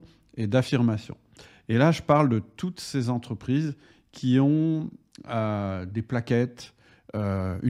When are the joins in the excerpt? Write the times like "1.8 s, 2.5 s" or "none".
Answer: none